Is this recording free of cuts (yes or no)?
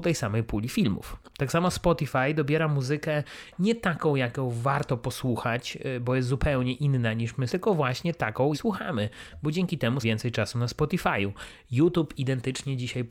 no